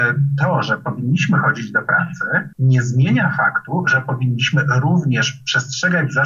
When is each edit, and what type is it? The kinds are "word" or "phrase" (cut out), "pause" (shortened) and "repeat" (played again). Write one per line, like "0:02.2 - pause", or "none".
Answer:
0:02.5 - pause